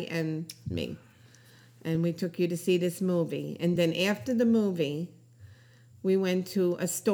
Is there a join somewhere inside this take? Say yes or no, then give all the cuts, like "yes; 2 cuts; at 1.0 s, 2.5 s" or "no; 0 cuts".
no; 0 cuts